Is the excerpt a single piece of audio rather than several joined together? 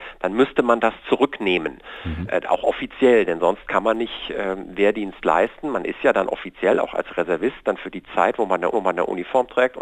no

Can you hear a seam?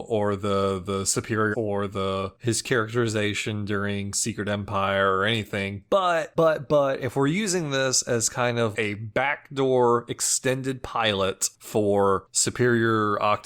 yes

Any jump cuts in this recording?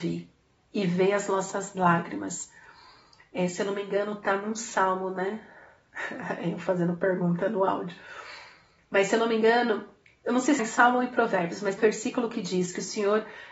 yes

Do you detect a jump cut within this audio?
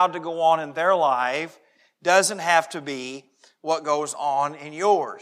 no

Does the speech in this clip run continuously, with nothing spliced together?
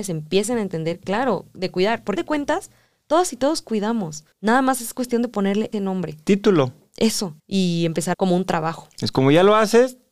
no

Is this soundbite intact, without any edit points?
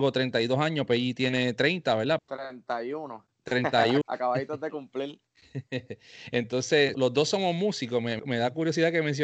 no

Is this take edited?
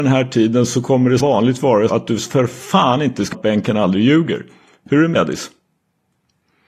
yes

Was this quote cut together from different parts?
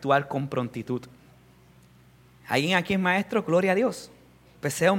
yes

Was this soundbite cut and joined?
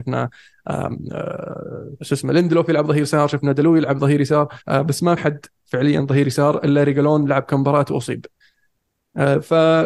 yes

